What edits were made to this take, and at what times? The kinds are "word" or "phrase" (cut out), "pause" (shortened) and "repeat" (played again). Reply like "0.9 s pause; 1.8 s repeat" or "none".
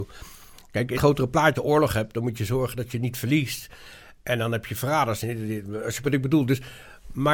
1.0 s word; 1.6 s word; 6.0 s word